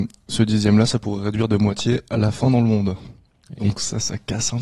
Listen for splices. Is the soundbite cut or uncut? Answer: uncut